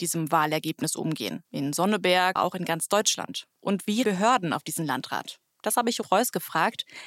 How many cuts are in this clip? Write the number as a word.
six